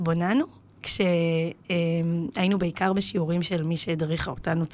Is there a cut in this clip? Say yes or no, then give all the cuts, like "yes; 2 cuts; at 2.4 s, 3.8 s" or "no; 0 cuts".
no; 0 cuts